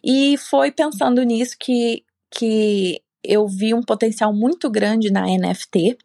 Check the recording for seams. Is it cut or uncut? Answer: uncut